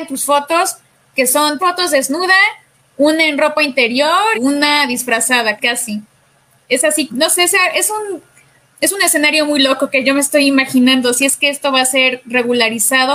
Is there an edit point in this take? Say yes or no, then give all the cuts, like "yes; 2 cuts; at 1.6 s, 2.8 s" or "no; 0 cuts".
yes; 4 cuts; at 1.6 s, 4.3 s, 5.6 s, 7.1 s